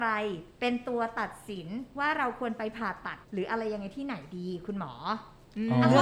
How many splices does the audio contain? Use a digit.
1